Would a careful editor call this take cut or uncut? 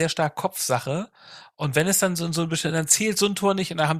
uncut